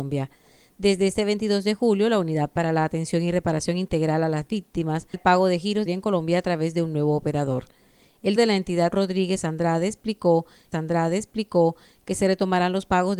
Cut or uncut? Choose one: cut